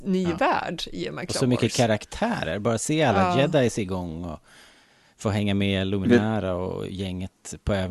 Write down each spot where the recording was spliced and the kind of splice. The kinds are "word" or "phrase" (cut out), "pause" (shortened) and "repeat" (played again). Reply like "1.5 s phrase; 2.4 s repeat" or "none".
none